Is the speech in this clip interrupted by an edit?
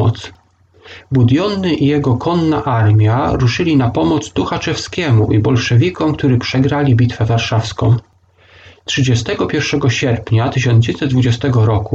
no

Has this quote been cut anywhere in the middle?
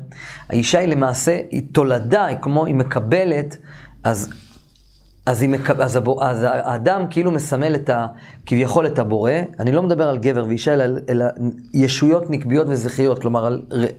no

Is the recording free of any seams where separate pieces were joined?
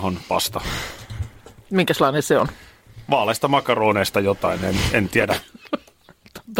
yes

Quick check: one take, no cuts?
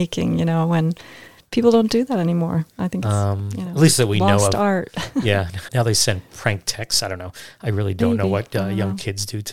no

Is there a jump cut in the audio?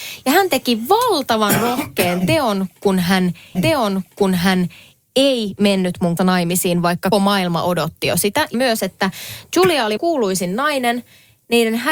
yes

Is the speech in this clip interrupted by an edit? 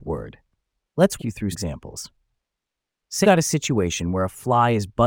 yes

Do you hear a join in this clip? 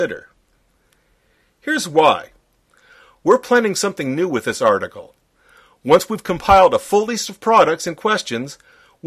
no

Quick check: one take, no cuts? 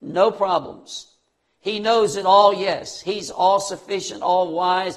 yes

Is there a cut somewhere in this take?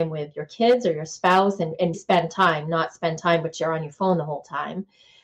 yes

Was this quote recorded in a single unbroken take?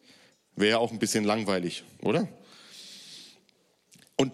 yes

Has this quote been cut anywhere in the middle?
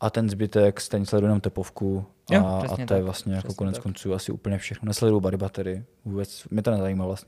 no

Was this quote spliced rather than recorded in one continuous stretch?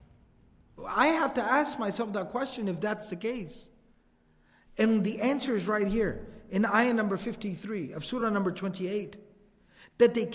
no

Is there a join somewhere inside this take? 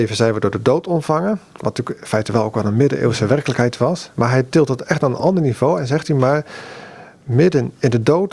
no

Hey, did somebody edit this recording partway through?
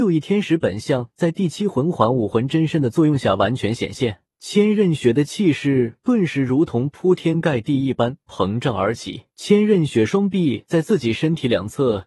yes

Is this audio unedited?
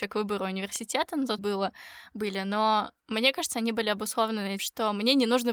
no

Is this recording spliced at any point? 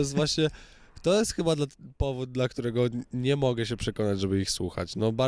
no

